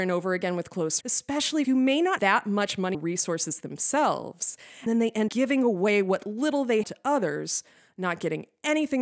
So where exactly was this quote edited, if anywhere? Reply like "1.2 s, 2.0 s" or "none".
1.0 s, 1.6 s, 2.2 s, 2.9 s, 4.9 s, 5.3 s, 6.8 s